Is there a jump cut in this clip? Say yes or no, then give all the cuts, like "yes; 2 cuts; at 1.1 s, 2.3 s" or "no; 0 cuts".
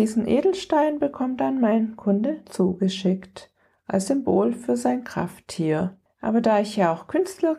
no; 0 cuts